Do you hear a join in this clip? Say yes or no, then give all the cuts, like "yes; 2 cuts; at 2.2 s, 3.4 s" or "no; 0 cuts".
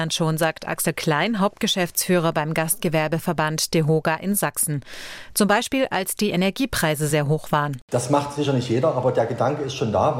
no; 0 cuts